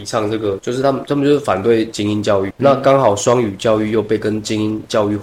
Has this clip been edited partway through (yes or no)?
yes